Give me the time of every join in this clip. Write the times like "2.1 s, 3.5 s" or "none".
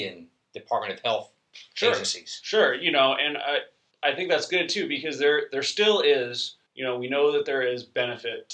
3.9 s, 6.7 s